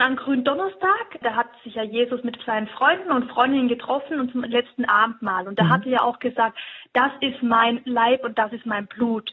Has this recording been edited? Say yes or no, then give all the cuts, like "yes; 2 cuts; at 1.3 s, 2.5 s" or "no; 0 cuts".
no; 0 cuts